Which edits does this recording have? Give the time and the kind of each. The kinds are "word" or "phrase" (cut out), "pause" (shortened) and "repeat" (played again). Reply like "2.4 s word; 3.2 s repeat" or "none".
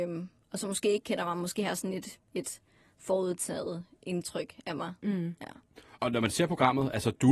none